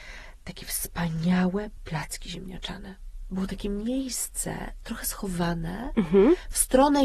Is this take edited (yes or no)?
no